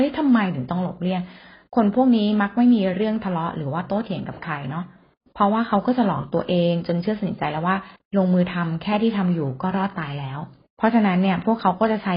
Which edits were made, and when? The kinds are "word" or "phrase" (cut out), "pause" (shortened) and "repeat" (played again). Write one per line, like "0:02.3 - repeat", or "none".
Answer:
none

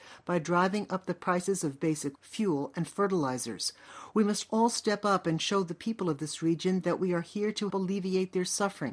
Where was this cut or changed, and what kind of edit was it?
0:02.1 - word
0:07.7 - word

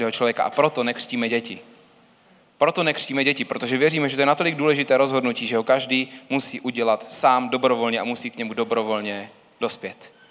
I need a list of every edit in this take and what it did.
none

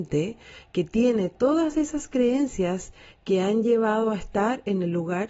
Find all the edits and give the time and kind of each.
none

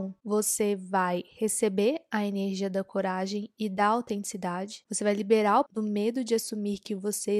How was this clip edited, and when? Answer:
0:05.7 - word

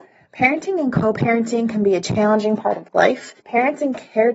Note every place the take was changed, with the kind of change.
0:03.4 - pause

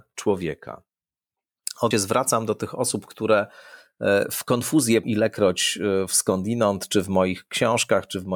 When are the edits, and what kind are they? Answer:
0:01.9 - phrase
0:05.0 - word

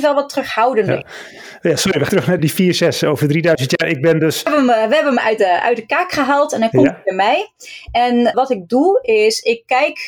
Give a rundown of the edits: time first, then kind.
0:02.1 - word
0:02.4 - word
0:08.3 - word

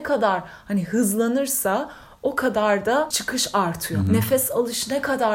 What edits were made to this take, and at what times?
0:03.1 - word

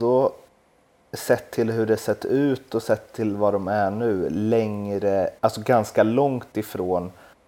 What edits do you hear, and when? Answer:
0:05.4 - pause

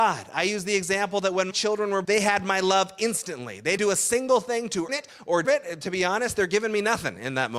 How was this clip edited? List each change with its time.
0:01.5 - word
0:02.0 - word
0:03.8 - word
0:04.9 - word
0:05.4 - word

